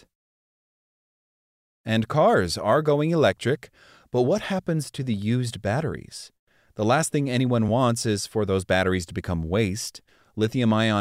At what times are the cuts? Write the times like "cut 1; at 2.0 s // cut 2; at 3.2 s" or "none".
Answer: none